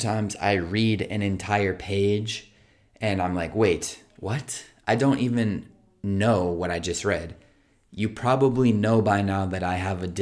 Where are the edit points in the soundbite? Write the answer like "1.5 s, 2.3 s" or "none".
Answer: none